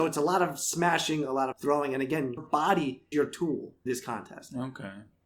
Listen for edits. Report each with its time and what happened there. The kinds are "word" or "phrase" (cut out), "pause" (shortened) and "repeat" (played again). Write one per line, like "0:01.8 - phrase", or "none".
0:01.5 - word
0:02.4 - word
0:03.1 - word
0:03.9 - word

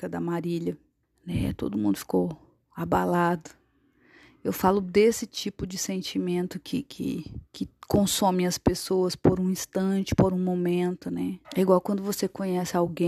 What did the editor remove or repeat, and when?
0:01.0 - pause
0:02.6 - pause
0:07.5 - pause
0:11.4 - pause

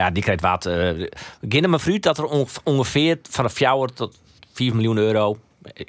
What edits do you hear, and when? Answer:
none

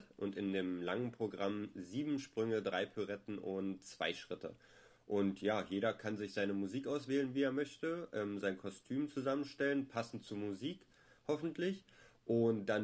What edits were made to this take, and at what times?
none

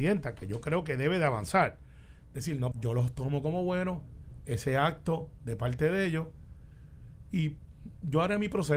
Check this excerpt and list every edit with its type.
0:02.7 - word

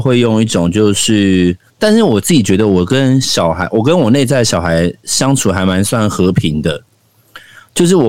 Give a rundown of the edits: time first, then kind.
0:01.7 - pause

